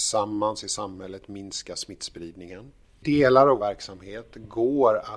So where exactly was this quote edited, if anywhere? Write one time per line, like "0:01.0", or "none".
0:03.6